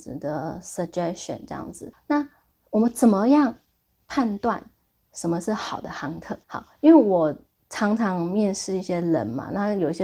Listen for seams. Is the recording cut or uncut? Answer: cut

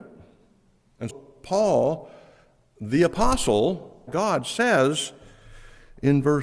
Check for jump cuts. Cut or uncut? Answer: cut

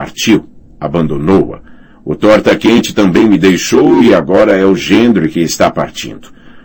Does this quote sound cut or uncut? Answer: uncut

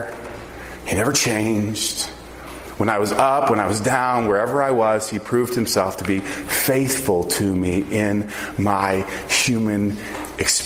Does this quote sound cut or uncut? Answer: uncut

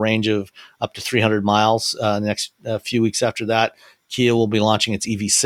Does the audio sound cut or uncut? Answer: uncut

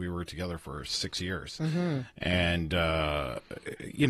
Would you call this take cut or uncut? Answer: uncut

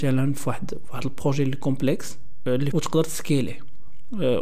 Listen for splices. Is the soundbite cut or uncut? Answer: cut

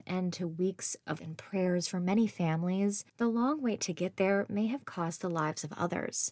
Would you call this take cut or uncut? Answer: cut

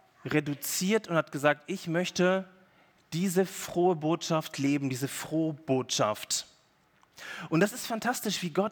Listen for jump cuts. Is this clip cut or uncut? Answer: uncut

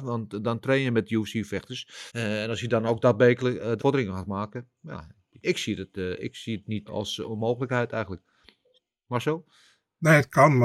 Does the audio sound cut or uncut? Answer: cut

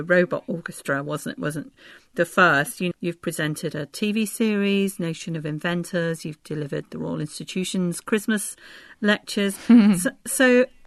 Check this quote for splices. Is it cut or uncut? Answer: cut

